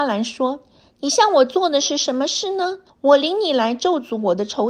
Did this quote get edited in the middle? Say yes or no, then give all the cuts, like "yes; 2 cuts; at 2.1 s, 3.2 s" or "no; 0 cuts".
yes; 1 cut; at 2.9 s